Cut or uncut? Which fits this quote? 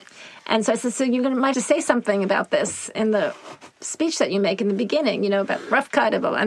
cut